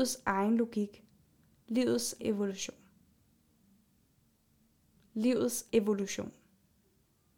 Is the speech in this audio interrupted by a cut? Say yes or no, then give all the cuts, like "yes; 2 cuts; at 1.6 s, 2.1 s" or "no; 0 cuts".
yes; 2 cuts; at 2.2 s, 5.7 s